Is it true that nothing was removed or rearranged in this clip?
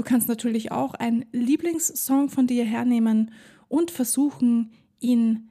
yes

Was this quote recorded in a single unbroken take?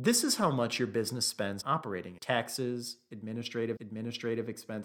no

